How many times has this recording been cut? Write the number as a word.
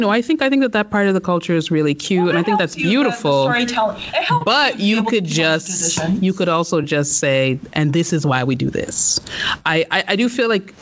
zero